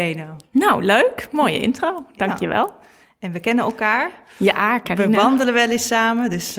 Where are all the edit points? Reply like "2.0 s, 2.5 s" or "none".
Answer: none